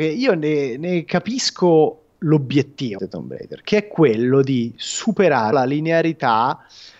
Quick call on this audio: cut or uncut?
cut